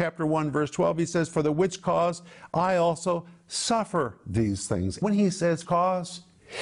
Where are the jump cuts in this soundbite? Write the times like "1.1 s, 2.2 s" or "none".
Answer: 5.0 s, 5.6 s